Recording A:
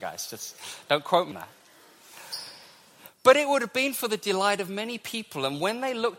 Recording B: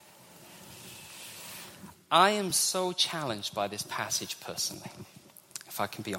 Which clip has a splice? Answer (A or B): A